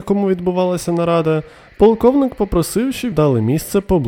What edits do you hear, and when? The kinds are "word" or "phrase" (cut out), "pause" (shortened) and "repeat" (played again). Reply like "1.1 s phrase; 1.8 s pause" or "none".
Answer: 3.1 s word